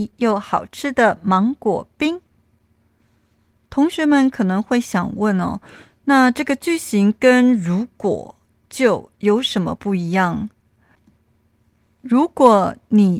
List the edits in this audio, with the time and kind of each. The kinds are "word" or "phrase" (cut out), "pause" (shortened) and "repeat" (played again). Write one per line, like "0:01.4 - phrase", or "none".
none